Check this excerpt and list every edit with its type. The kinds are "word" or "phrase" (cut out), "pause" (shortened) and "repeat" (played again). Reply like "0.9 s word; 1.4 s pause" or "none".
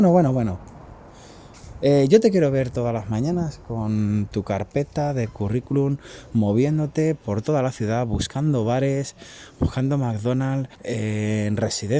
10.7 s pause